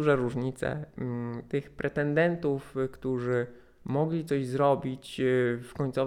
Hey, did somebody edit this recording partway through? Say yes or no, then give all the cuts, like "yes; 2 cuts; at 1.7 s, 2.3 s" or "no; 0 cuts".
no; 0 cuts